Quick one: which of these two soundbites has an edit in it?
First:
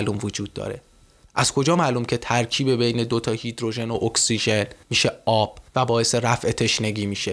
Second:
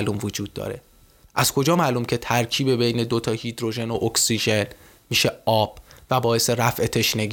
first; 2 cuts; at 4.8 s, 5.7 s

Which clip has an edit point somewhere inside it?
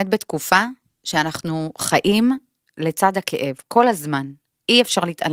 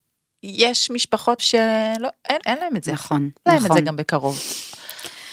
second; 3 cuts; at 1.4 s, 2.4 s, 3.5 s

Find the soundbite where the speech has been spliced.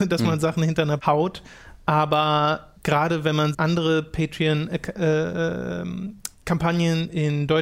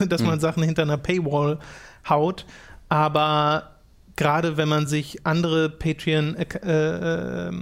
first; 3 cuts; at 1.0 s, 2.8 s, 3.5 s

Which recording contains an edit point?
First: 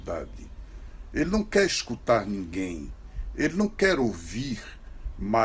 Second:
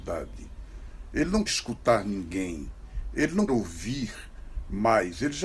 second; 2 cuts; at 1.5 s, 3.5 s

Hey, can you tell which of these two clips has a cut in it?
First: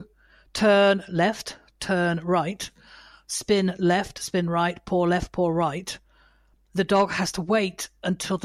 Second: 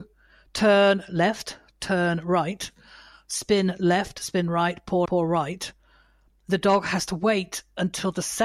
second; 1 cut; at 5.0 s

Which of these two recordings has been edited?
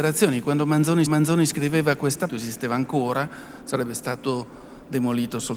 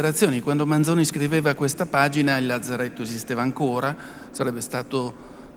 first; 2 cuts; at 1.1 s, 2.3 s

